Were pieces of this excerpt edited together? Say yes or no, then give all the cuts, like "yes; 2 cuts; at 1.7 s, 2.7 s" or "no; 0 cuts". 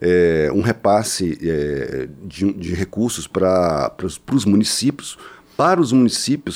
no; 0 cuts